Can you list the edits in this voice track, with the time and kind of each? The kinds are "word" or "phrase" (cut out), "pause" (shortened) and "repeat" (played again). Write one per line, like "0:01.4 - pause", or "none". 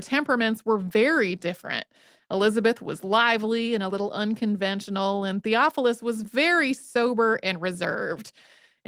none